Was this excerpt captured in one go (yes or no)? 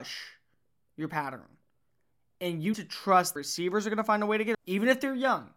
no